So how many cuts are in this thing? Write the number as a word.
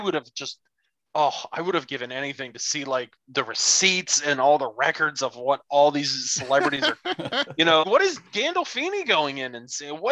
one